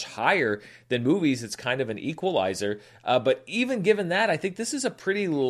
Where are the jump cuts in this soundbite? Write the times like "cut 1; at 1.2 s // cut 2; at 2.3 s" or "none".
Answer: none